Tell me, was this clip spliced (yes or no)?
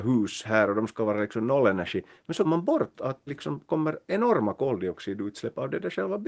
yes